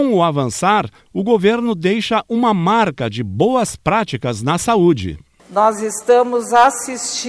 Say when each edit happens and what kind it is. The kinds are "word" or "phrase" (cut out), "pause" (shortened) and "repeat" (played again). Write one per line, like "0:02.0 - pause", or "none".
none